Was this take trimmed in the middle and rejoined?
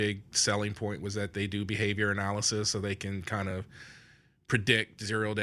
no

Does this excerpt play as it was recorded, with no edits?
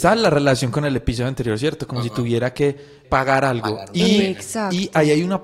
no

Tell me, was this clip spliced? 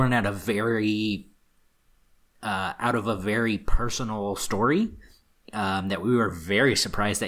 no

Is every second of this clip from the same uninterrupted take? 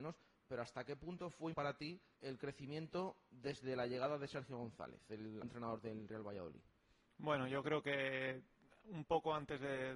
no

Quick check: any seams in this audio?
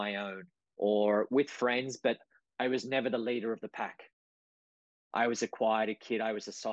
no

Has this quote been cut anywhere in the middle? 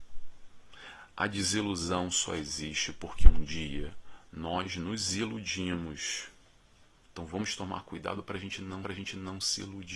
yes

